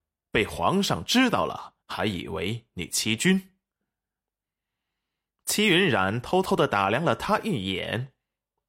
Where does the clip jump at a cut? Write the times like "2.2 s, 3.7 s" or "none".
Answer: 1.8 s, 3.7 s